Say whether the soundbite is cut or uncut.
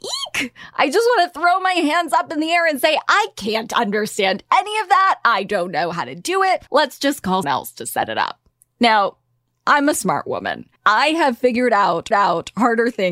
cut